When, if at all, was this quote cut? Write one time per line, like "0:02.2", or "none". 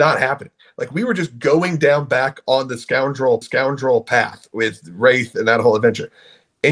0:03.4

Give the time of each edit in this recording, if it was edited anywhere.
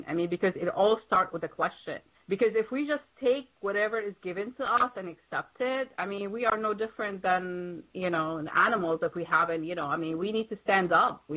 0:02.1

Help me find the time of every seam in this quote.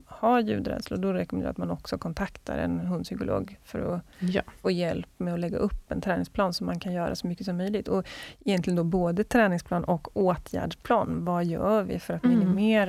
0:04.6

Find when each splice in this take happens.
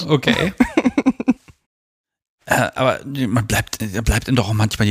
0:01.4

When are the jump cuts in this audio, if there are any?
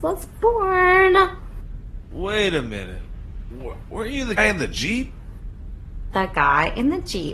0:04.4

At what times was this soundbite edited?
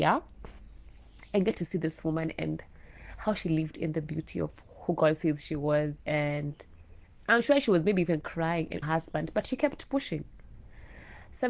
0:08.8

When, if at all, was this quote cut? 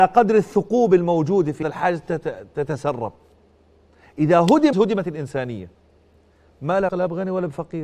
0:01.6
0:04.7
0:06.9

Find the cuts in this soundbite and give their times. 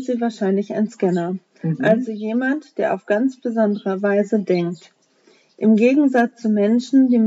none

